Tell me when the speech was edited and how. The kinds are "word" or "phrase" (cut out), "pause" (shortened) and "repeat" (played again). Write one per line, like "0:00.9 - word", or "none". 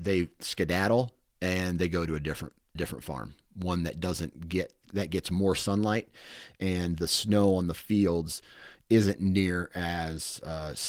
0:02.8 - word